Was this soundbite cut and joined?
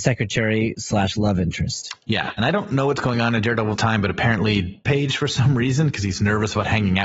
yes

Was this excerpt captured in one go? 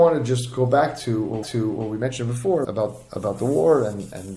no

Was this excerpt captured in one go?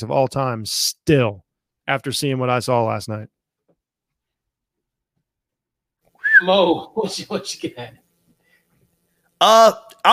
yes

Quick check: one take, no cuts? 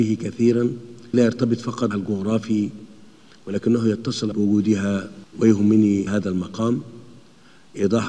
no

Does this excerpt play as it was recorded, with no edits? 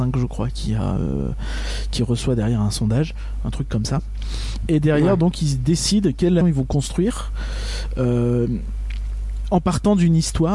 no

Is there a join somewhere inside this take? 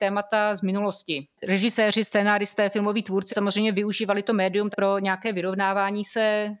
yes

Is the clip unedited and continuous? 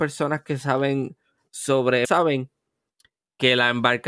no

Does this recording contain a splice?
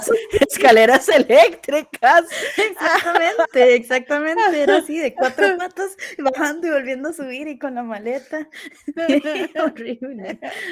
no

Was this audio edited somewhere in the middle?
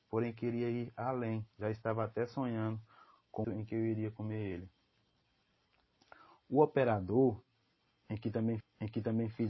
yes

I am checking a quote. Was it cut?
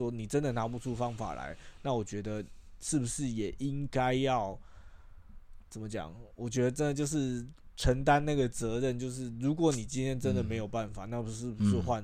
yes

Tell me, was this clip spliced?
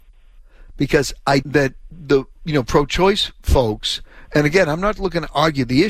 yes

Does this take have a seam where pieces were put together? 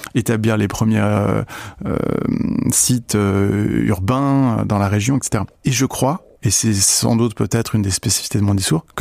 yes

